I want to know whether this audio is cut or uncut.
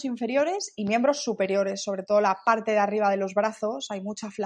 uncut